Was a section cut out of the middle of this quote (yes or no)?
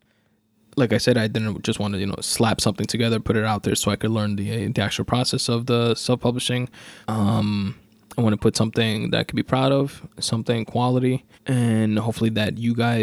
yes